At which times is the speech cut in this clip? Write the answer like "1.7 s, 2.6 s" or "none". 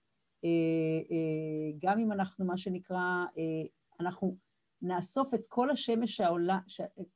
none